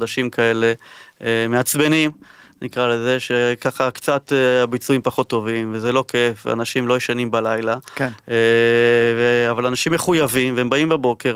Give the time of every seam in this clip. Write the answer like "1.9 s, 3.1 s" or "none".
none